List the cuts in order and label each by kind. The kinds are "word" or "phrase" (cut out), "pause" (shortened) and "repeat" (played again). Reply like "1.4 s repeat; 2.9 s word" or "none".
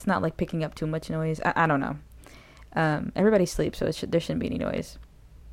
none